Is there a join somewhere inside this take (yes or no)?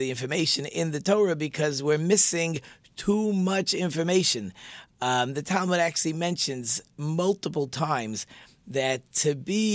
no